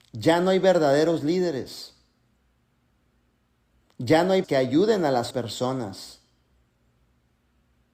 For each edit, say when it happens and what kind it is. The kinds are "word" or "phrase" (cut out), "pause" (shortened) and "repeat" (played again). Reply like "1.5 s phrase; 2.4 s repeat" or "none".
4.4 s word; 5.3 s word